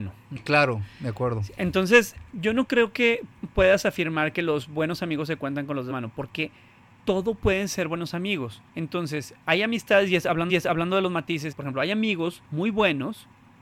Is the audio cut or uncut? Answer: cut